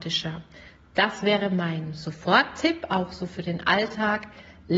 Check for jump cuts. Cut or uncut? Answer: uncut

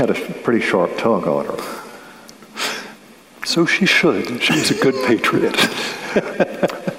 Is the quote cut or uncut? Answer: uncut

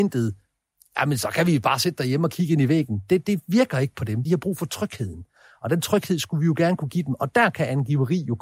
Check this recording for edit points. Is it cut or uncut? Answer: cut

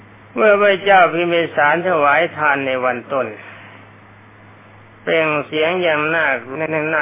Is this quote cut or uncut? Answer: uncut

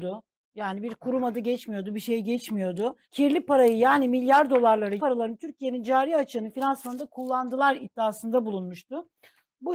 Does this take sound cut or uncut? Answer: cut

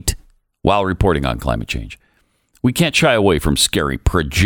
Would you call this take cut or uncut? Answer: uncut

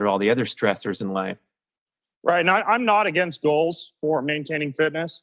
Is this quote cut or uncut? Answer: uncut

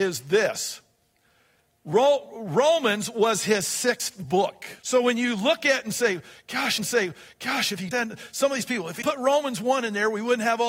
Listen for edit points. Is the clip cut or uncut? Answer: cut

